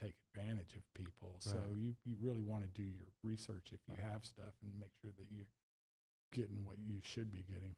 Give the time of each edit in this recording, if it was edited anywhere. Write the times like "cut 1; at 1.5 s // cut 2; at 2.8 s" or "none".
none